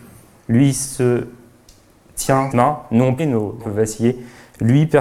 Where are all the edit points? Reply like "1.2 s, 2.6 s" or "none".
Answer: 2.5 s, 3.2 s, 3.6 s